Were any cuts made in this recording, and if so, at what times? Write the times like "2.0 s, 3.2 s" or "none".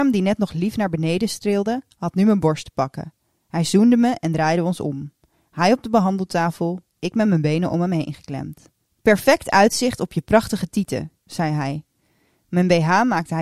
none